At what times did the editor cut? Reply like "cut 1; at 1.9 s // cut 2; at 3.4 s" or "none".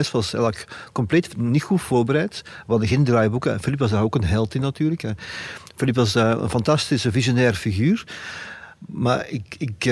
none